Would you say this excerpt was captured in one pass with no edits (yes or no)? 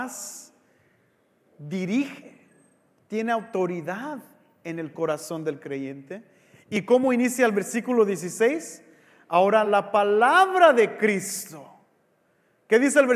yes